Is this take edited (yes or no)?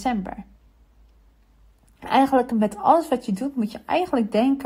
no